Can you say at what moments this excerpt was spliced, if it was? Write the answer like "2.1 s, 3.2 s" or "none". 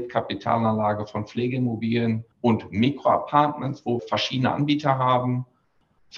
2.3 s, 4.0 s

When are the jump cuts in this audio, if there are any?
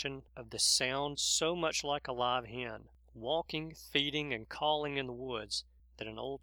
1.1 s

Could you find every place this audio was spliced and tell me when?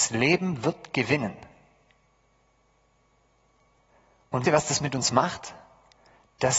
4.5 s

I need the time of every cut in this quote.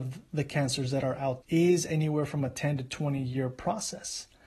1.4 s

